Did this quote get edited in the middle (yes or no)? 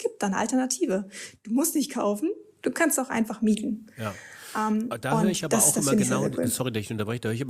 no